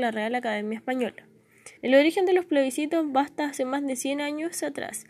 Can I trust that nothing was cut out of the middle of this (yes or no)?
no